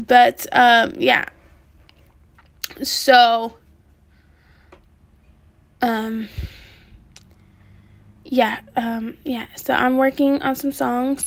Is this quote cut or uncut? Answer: uncut